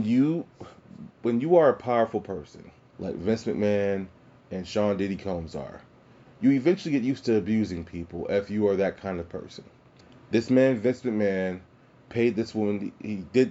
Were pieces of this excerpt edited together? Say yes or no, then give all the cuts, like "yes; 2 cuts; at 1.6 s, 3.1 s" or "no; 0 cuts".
no; 0 cuts